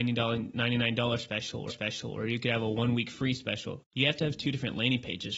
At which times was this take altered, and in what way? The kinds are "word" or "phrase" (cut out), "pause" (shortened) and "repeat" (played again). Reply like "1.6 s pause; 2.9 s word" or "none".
1.7 s repeat